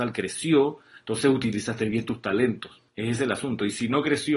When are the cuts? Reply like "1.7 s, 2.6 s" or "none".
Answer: 2.9 s